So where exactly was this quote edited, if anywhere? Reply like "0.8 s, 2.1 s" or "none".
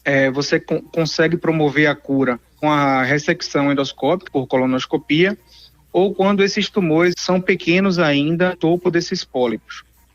2.6 s, 4.3 s, 7.1 s, 8.5 s